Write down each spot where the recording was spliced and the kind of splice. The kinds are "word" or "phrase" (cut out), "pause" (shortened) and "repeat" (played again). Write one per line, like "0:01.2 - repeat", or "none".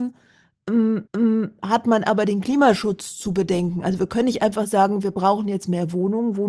0:01.1 - repeat